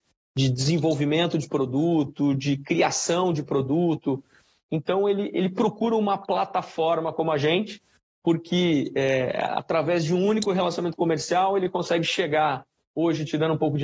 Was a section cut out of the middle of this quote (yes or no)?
no